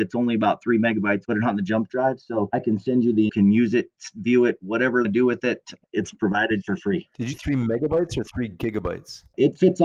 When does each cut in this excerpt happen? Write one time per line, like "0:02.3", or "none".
0:01.2
0:03.3
0:05.0
0:07.3